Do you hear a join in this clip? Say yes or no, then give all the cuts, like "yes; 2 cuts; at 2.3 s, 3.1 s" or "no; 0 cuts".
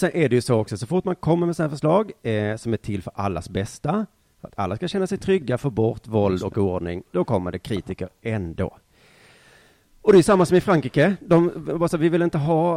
no; 0 cuts